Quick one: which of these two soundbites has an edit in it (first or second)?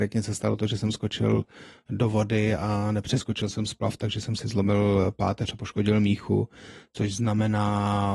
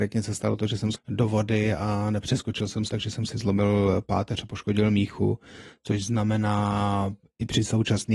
second